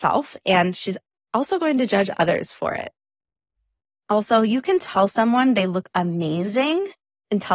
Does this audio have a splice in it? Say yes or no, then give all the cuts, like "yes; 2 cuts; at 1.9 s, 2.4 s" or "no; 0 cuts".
no; 0 cuts